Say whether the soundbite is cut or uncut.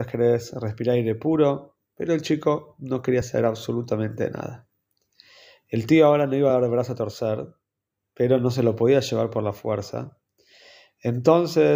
uncut